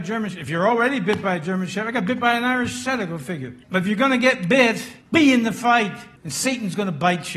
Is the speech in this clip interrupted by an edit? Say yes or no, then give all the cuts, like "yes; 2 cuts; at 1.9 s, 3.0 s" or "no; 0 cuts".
yes; 3 cuts; at 3.6 s, 5.0 s, 6.2 s